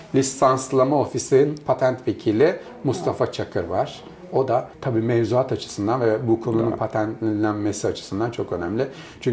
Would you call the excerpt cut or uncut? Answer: cut